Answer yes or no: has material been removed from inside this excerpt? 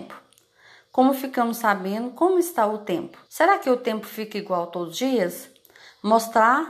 yes